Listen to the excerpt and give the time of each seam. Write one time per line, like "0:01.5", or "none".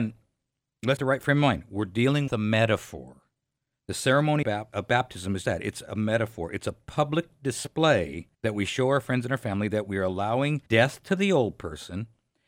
0:01.0
0:02.3
0:04.4
0:05.4
0:08.3
0:10.7